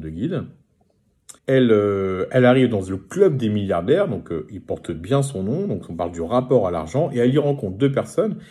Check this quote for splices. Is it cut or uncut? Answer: cut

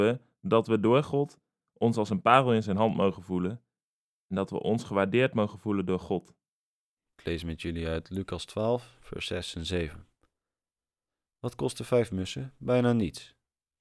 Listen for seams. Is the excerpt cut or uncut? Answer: uncut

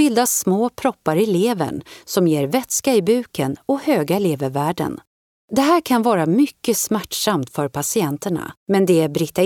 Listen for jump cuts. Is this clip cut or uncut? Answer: uncut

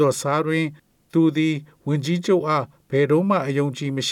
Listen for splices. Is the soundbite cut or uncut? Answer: uncut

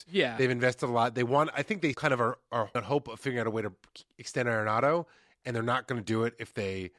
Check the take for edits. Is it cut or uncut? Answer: cut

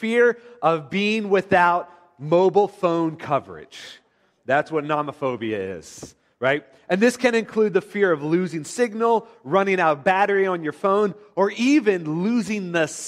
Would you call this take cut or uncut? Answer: uncut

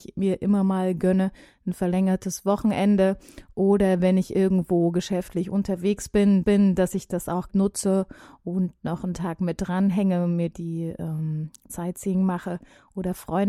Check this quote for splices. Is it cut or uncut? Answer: cut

